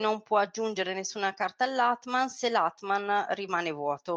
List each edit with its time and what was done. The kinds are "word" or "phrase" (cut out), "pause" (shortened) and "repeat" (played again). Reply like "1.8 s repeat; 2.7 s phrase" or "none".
none